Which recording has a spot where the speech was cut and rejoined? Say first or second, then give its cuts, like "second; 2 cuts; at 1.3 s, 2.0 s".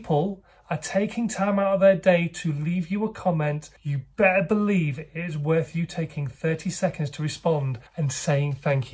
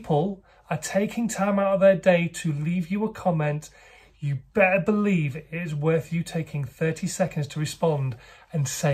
first; 2 cuts; at 3.8 s, 7.9 s